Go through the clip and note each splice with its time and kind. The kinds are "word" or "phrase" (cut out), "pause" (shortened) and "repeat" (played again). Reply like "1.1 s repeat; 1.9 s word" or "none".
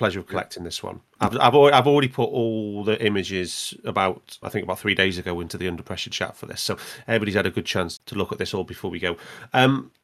1.3 s word; 4.4 s word; 8.0 s word